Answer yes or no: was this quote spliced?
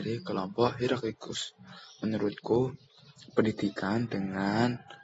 no